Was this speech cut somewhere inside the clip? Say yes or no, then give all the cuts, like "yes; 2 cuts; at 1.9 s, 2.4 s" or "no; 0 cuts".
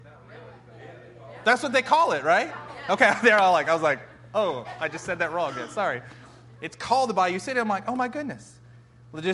no; 0 cuts